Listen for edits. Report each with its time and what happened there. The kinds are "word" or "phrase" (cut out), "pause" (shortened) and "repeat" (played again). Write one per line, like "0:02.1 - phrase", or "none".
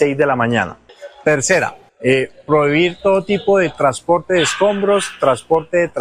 none